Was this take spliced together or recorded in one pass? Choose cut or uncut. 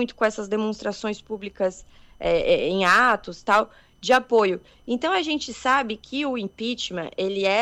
uncut